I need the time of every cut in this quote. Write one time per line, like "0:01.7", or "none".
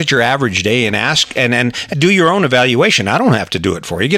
0:01.9